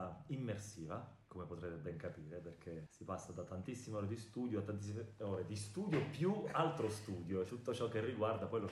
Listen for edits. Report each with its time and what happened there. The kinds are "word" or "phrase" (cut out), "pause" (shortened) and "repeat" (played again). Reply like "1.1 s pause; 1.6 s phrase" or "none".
1.2 s pause; 7.5 s word